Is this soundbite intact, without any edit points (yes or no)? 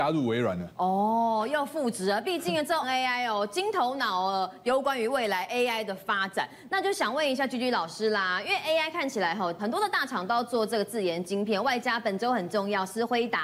no